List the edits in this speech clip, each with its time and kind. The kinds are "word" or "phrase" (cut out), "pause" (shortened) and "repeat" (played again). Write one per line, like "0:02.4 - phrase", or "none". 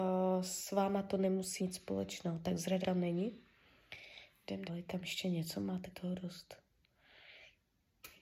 0:01.6 - word
0:02.8 - word
0:04.7 - word
0:05.9 - word